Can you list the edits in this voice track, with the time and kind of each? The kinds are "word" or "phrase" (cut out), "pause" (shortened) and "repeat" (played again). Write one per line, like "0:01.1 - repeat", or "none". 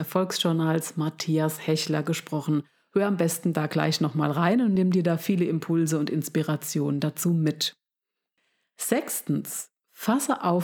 none